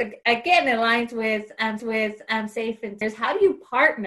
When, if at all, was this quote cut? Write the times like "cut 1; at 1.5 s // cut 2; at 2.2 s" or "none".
cut 1; at 1.8 s // cut 2; at 3.0 s